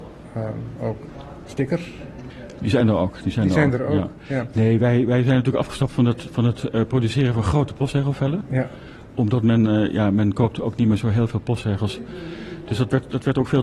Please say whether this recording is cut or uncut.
uncut